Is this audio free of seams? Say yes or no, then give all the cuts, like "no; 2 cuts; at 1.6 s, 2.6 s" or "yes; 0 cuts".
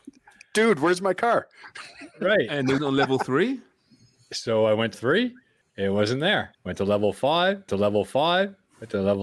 no; 5 cuts; at 2.8 s, 4.9 s, 5.6 s, 6.5 s, 7.7 s